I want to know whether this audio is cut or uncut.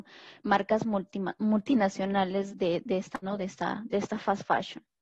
cut